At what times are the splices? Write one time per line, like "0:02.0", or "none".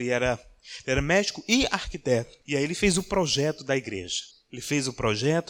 0:02.4
0:04.3